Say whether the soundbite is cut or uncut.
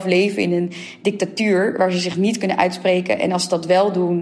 uncut